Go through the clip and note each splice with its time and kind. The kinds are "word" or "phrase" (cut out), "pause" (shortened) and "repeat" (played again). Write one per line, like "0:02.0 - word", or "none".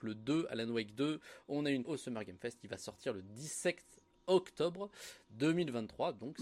0:01.8 - phrase